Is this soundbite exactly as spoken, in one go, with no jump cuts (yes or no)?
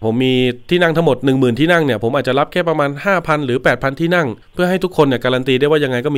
no